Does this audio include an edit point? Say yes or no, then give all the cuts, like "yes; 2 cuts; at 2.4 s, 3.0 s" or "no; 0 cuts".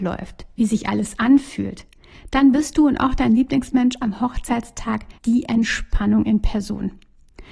yes; 1 cut; at 5.2 s